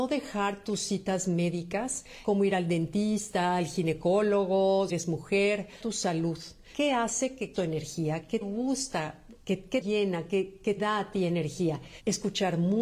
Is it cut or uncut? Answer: cut